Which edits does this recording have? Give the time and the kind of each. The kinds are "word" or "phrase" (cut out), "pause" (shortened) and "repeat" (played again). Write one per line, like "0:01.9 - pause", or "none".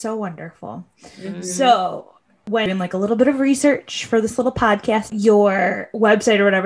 0:05.1 - word